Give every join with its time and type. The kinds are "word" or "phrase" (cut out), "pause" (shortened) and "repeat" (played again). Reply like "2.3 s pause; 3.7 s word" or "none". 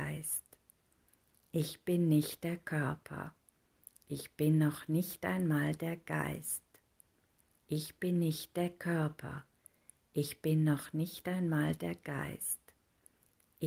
none